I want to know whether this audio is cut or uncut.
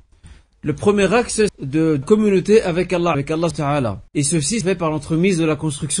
cut